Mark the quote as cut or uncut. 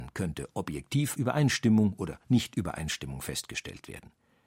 cut